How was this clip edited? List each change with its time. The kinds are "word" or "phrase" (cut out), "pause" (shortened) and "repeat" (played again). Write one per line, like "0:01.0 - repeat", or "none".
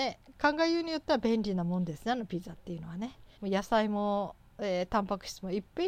0:03.4 - pause